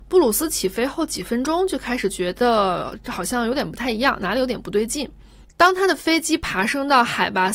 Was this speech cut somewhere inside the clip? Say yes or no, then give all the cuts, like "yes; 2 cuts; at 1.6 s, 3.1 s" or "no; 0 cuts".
yes; 1 cut; at 5.5 s